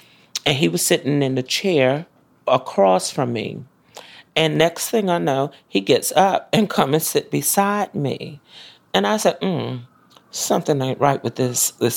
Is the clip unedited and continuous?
yes; 0 cuts

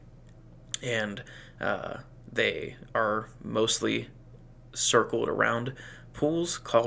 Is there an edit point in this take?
no; 0 cuts

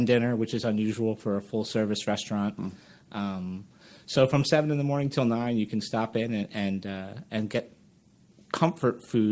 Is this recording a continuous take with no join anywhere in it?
yes; 0 cuts

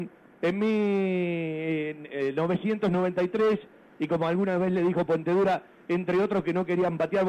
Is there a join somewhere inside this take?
no; 0 cuts

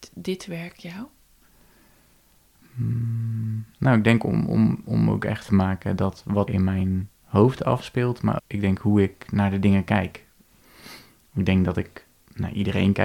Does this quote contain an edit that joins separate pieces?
yes; 5 cuts; at 3.7 s, 5.5 s, 6.5 s, 7.2 s, 8.4 s

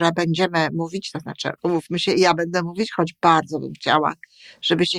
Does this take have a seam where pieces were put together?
yes; 1 cut; at 1.6 s

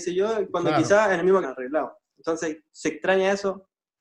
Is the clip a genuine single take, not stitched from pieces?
no; 1 cut; at 1.4 s

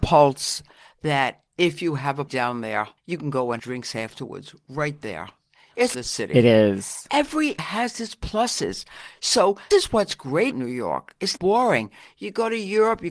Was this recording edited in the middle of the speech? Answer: yes; 9 cuts; at 1.5 s, 2.3 s, 3.0 s, 3.6 s, 5.9 s, 7.6 s, 9.7 s, 10.5 s, 11.4 s

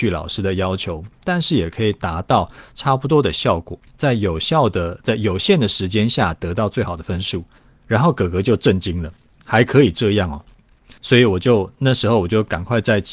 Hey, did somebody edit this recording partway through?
yes; 4 cuts; at 3.9 s, 7.6 s, 9.4 s, 11.0 s

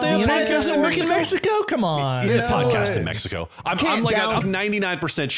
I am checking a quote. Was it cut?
yes; 1 cut; at 4.4 s

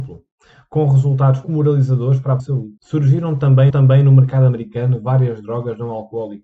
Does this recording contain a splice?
yes; 4 cuts; at 1.4 s, 2.4 s, 2.8 s, 3.7 s

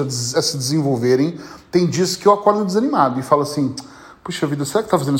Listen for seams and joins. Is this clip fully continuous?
yes; 0 cuts

